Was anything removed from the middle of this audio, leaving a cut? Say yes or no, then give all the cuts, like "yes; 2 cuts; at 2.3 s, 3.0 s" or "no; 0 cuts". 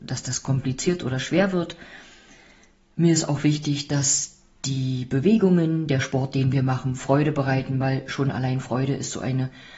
no; 0 cuts